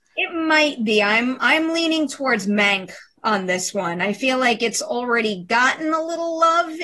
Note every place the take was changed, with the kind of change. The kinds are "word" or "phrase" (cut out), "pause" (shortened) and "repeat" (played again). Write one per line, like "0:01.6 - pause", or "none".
none